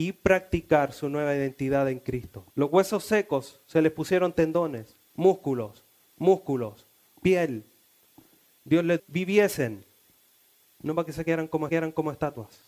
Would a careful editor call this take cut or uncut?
cut